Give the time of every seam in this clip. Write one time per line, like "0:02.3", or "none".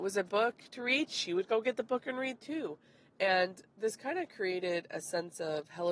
none